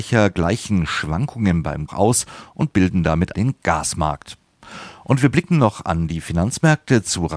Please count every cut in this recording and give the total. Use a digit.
2